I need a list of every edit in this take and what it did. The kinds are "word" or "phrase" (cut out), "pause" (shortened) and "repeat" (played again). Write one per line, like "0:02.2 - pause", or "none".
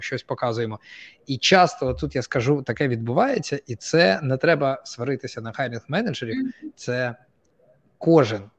none